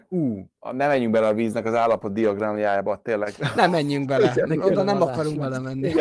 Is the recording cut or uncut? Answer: cut